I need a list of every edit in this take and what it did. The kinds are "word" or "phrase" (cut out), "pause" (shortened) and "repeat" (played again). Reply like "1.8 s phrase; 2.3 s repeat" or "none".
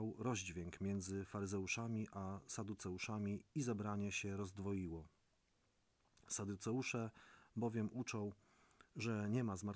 none